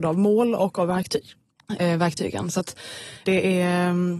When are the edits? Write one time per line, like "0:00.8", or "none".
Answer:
0:03.3